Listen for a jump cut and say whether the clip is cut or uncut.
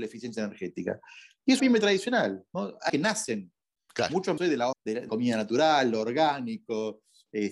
cut